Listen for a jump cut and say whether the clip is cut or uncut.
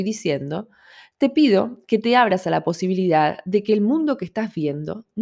uncut